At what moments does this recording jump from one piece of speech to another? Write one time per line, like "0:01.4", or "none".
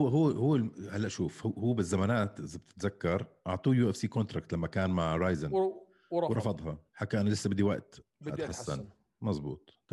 0:06.9
0:08.1